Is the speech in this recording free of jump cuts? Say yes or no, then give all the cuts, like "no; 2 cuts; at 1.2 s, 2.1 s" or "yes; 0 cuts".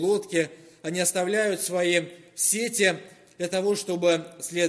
yes; 0 cuts